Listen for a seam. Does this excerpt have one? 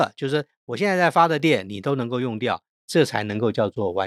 no; 0 cuts

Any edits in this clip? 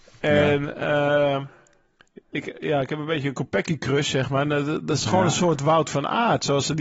no; 0 cuts

